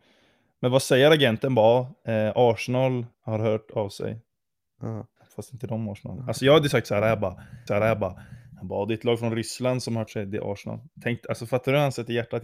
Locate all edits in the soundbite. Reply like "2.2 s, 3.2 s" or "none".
3.1 s, 5.2 s, 7.7 s, 10.1 s